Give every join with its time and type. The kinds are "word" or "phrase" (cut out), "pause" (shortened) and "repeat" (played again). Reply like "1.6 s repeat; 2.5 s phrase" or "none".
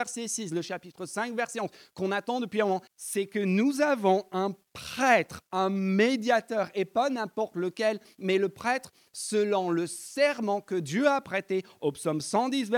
2.9 s word